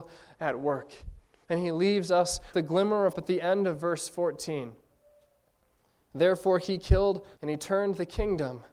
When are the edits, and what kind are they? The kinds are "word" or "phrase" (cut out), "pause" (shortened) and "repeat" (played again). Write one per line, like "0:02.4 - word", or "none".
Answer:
0:02.5 - word
0:03.1 - word
0:07.4 - word